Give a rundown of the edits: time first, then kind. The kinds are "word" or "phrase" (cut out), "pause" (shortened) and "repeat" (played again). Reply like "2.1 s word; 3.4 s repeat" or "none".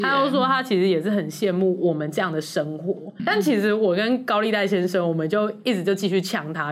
3.2 s word